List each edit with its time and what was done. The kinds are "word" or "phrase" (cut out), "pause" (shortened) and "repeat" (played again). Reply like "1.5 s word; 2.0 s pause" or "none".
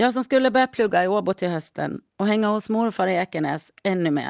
none